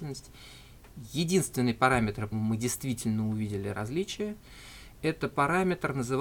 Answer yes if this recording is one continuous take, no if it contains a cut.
no